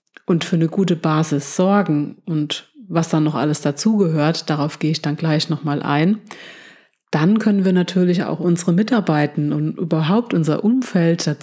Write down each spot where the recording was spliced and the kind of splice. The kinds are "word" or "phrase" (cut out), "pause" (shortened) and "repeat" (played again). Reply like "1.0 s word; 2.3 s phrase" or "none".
none